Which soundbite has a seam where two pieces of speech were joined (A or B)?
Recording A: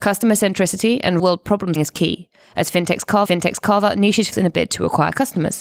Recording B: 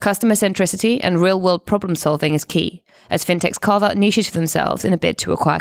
A